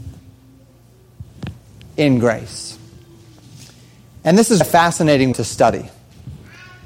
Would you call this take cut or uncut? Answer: cut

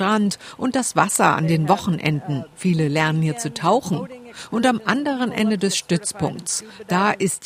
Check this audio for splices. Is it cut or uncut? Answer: uncut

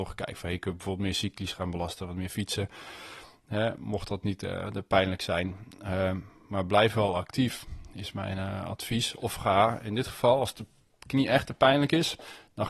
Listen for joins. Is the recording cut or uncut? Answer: uncut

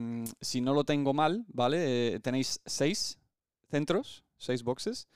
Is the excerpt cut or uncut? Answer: uncut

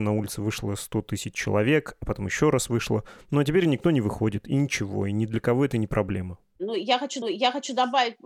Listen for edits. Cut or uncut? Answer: cut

